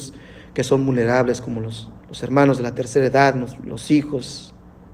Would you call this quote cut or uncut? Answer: cut